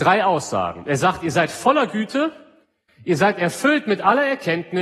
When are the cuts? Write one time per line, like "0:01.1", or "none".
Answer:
none